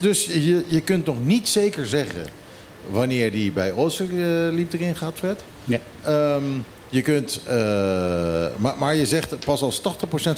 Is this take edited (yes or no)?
no